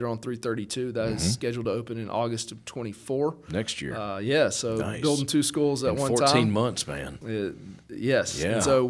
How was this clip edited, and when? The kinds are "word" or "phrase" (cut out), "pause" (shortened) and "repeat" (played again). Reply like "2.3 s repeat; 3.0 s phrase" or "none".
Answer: none